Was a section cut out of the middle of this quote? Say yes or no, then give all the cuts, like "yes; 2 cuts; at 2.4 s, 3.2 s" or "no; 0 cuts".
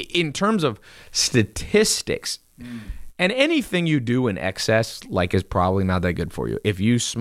no; 0 cuts